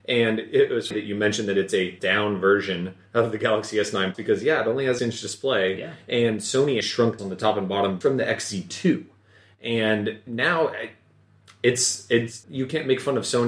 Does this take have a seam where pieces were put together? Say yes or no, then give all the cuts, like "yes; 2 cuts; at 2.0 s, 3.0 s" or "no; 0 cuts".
yes; 9 cuts; at 0.9 s, 2.0 s, 4.1 s, 5.0 s, 6.8 s, 7.2 s, 8.0 s, 10.3 s, 12.4 s